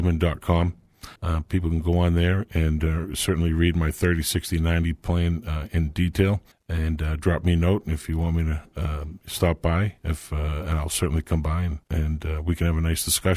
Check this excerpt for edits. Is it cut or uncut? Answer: cut